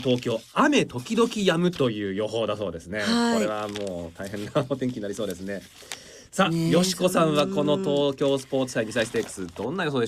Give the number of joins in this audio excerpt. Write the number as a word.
zero